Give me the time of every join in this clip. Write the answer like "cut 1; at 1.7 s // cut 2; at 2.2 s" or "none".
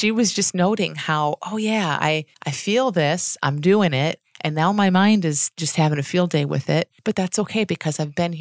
cut 1; at 2.3 s // cut 2; at 7.0 s